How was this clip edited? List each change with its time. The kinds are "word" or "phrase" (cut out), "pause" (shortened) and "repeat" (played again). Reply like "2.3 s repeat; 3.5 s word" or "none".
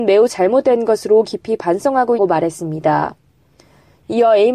2.2 s word